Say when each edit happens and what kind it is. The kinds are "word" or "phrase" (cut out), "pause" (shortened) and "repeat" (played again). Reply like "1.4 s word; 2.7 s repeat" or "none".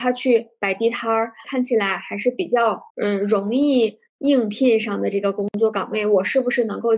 2.9 s pause; 4.1 s pause